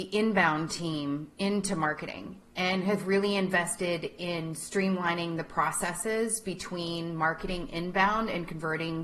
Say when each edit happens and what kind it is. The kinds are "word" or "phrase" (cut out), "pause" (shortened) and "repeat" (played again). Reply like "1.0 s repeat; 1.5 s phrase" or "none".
none